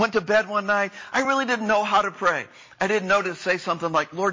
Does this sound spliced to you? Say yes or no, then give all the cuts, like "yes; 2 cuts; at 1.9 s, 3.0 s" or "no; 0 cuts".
no; 0 cuts